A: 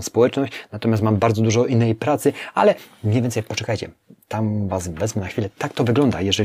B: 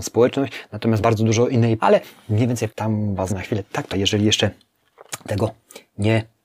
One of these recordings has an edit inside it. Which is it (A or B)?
B